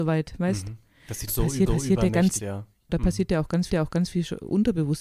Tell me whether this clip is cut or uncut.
cut